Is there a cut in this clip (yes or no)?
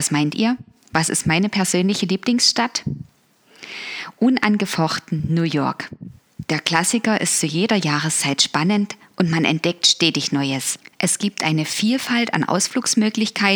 no